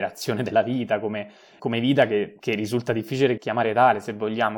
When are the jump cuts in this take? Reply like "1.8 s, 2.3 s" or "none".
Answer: 1.6 s, 2.4 s, 3.4 s